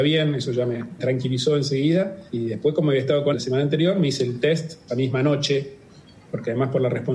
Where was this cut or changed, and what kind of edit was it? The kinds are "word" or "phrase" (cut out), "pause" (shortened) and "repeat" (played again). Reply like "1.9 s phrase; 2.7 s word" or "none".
1.0 s word; 2.3 s pause; 3.3 s word; 4.9 s word